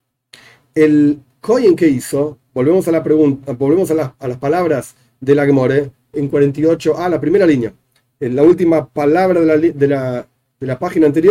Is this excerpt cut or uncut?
uncut